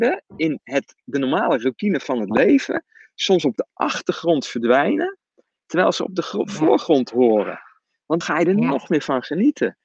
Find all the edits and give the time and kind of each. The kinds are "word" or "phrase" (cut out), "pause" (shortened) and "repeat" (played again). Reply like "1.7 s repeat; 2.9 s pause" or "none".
8.2 s word